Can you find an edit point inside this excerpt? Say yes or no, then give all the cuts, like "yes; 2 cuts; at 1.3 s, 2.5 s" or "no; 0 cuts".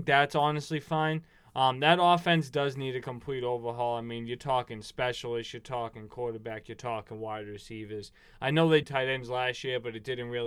yes; 1 cut; at 8.8 s